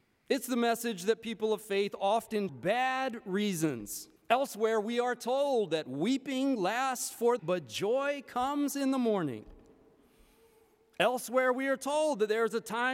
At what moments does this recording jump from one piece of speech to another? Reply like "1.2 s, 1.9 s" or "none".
2.5 s, 4.2 s, 7.4 s